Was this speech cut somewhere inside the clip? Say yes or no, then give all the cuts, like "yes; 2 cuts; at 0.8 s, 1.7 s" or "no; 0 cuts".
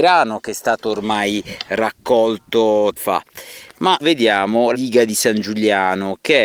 yes; 3 cuts; at 3.0 s, 4.0 s, 4.7 s